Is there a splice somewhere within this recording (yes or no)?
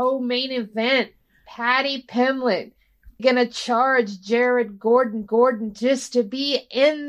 yes